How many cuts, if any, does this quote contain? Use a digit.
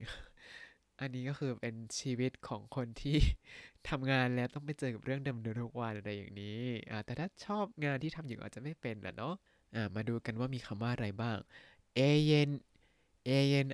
0